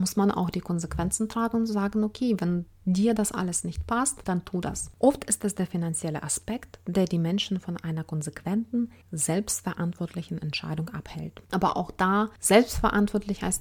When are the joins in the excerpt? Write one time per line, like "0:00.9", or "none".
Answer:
0:11.4